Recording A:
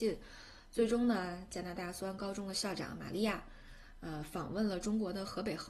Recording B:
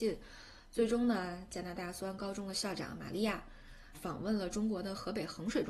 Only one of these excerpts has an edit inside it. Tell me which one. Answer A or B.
B